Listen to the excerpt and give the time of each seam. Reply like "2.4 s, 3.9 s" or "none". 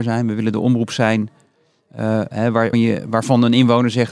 2.7 s